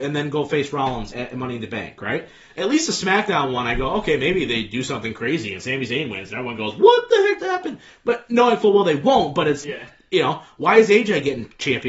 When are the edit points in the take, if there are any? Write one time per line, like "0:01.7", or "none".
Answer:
0:01.1
0:07.4
0:09.6